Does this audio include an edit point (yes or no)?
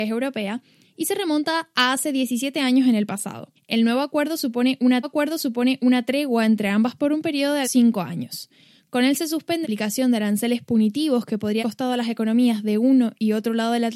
yes